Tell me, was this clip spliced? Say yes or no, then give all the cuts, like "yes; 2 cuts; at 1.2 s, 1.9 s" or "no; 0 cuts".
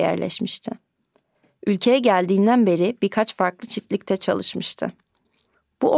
no; 0 cuts